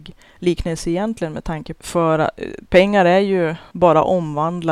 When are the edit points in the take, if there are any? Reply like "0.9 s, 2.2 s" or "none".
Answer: 1.8 s